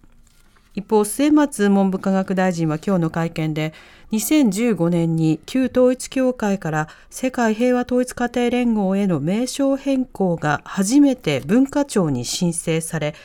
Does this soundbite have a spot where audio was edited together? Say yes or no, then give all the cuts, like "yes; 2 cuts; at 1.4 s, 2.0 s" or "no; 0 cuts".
no; 0 cuts